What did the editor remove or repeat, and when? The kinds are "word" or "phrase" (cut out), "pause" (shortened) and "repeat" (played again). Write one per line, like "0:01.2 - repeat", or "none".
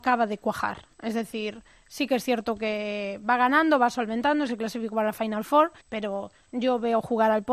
0:00.9 - pause
0:05.8 - pause